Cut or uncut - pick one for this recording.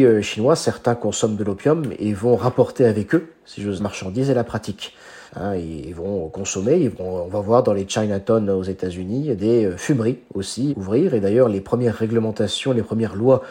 cut